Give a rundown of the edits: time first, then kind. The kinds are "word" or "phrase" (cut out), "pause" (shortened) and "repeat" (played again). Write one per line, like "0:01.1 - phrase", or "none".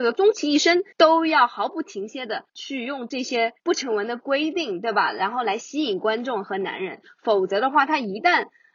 0:00.9 - pause
0:02.5 - pause
0:03.6 - pause